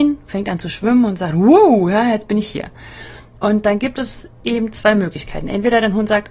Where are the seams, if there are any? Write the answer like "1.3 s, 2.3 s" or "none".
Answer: none